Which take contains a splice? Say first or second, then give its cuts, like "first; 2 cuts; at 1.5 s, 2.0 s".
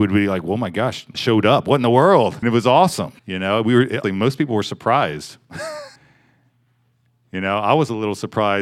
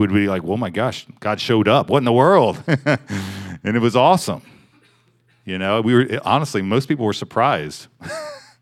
first; 5 cuts; at 1.1 s, 2.4 s, 3.2 s, 4.0 s, 6.0 s